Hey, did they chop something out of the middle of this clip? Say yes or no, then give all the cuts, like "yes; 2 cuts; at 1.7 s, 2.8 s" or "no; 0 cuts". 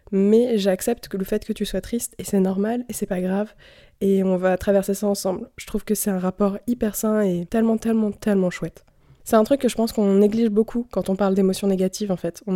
no; 0 cuts